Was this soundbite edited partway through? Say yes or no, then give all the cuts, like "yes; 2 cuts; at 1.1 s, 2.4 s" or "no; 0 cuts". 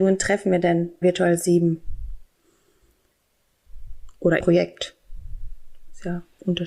yes; 2 cuts; at 1.0 s, 4.4 s